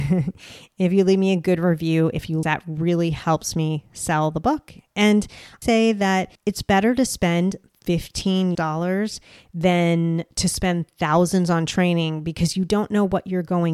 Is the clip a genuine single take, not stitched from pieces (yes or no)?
no